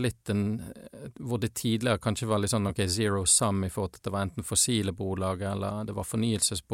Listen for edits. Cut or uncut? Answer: uncut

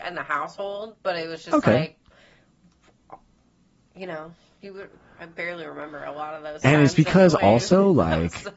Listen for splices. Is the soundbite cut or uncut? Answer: uncut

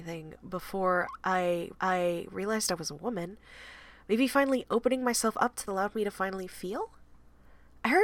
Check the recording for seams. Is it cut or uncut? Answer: cut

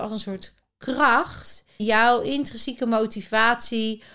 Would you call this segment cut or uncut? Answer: cut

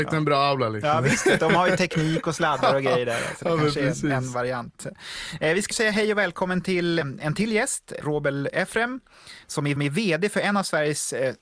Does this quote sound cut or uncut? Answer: cut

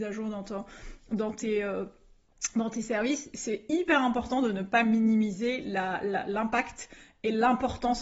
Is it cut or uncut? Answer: uncut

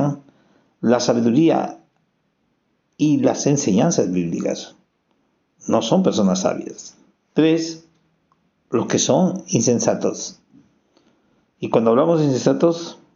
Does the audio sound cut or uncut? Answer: cut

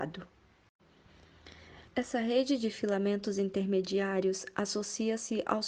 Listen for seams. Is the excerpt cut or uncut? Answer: cut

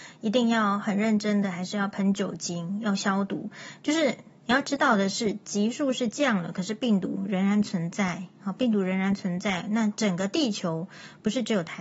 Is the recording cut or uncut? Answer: uncut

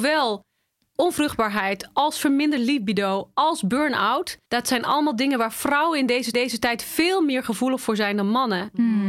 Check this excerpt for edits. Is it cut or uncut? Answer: cut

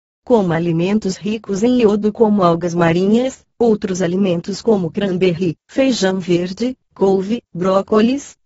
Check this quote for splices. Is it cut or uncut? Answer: uncut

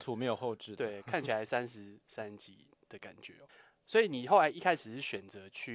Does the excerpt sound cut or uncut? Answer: cut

